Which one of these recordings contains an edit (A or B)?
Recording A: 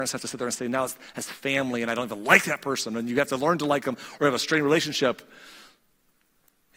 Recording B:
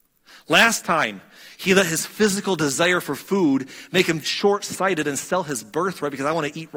B